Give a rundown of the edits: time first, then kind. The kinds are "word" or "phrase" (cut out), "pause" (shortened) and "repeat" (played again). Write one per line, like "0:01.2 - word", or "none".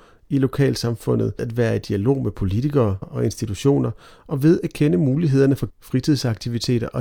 0:01.4 - word
0:03.0 - word
0:05.7 - word